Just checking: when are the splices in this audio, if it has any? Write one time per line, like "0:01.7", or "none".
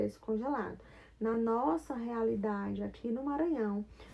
none